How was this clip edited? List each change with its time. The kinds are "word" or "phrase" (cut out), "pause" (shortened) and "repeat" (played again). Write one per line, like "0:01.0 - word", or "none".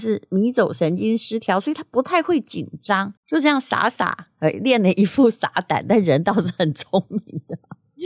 0:03.2 - pause